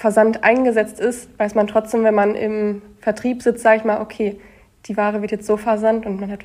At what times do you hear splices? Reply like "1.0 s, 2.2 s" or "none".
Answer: 5.5 s

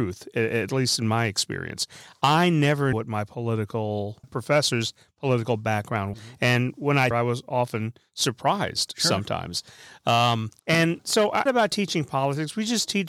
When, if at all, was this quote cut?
2.9 s, 4.2 s, 6.1 s, 7.1 s, 10.6 s, 11.5 s

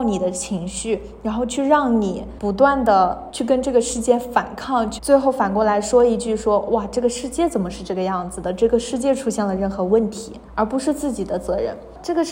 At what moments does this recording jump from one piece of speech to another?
5.0 s

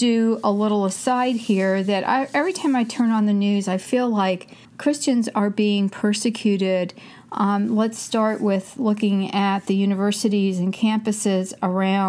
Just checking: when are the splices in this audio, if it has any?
4.6 s

